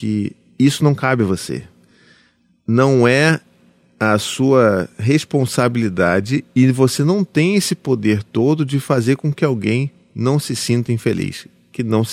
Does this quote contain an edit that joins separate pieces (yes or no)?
no